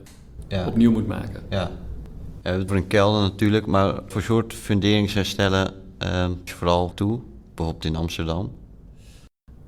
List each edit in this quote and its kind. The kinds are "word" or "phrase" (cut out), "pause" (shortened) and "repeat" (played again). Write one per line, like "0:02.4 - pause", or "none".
0:02.7 - phrase
0:04.1 - word
0:06.5 - word
0:06.9 - word